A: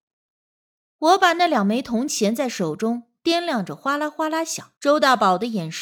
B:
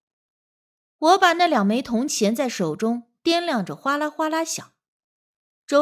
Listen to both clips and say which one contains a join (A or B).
A